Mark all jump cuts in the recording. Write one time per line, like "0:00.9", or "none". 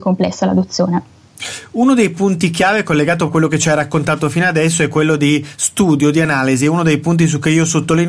0:03.3